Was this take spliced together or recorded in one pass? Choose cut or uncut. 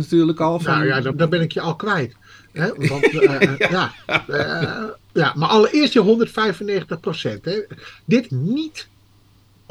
cut